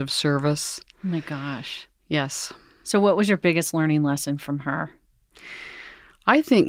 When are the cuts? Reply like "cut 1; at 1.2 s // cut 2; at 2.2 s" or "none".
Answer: none

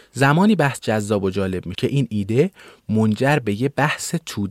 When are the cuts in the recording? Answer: cut 1; at 1.7 s

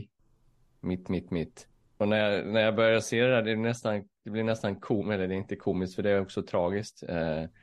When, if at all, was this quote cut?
cut 1; at 1.7 s

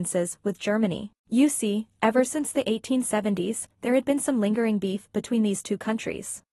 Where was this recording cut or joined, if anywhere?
cut 1; at 1.2 s

